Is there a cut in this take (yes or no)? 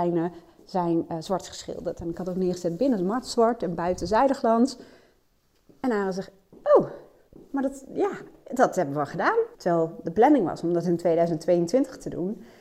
yes